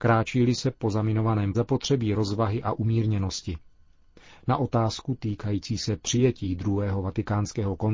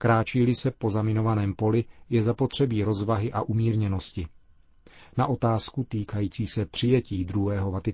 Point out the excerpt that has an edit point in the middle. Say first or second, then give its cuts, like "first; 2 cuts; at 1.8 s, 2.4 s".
first; 1 cut; at 1.5 s